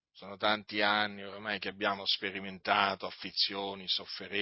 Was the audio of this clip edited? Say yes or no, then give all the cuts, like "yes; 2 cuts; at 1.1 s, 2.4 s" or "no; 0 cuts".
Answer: no; 0 cuts